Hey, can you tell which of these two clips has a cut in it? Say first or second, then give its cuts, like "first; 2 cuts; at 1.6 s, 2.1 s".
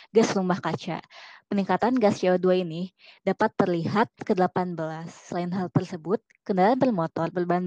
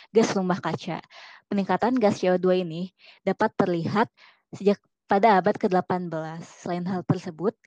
first; 1 cut; at 4.2 s